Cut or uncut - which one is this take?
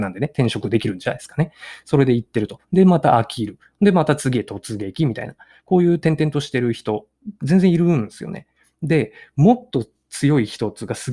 uncut